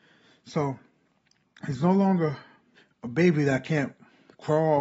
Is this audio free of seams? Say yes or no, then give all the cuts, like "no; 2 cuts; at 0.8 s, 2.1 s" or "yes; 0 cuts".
no; 1 cut; at 2.8 s